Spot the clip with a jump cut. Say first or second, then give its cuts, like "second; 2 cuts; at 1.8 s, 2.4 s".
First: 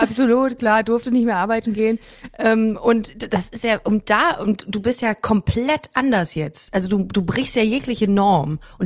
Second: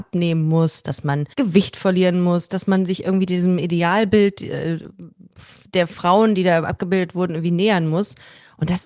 second; 1 cut; at 1.3 s